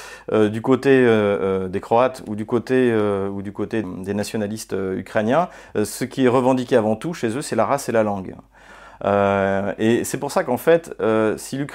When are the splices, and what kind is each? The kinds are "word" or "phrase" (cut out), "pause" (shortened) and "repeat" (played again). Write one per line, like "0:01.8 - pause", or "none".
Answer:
0:03.8 - word